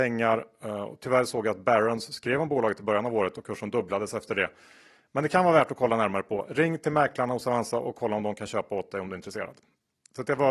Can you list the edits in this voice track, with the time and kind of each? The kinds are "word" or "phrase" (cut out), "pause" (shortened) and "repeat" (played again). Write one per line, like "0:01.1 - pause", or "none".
none